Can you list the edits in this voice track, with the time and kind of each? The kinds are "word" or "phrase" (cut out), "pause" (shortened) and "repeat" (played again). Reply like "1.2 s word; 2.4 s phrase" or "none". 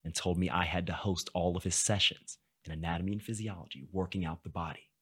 none